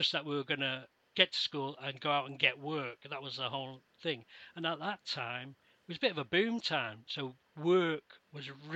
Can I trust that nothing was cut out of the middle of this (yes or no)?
no